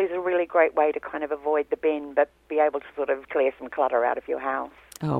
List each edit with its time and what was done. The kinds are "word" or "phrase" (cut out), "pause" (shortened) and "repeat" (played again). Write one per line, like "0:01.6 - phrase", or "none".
0:03.2 - pause